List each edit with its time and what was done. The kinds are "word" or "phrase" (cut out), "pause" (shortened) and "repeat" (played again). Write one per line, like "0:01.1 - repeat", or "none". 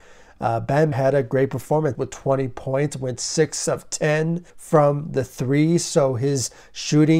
0:00.9 - word
0:01.9 - phrase
0:04.5 - pause